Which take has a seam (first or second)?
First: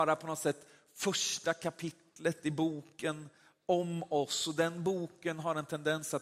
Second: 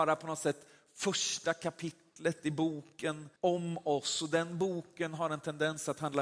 second